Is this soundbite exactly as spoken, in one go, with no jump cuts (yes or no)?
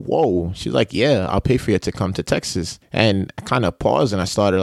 no